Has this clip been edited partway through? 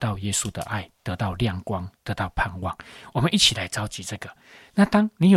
no; 0 cuts

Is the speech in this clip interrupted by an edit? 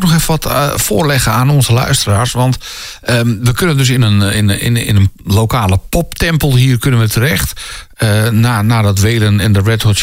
no; 0 cuts

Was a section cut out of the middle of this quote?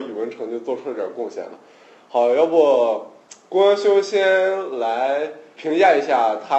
yes; 1 cut; at 5.6 s

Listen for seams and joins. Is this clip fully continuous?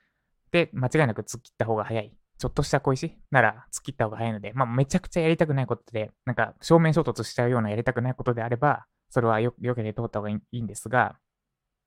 no; 4 cuts; at 2.3 s, 3.2 s, 6.2 s, 9.0 s

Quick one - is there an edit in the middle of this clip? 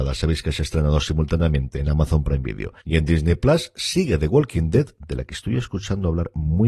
yes; 1 cut; at 2.8 s

